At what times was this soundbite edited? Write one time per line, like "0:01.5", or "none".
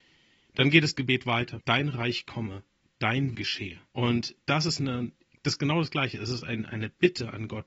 0:01.6
0:03.3
0:03.9